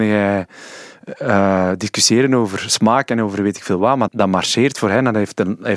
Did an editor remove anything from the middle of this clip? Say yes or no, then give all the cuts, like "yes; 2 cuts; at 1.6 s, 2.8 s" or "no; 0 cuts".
yes; 1 cut; at 4.1 s